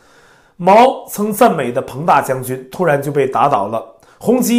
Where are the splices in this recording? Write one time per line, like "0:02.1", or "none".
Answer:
none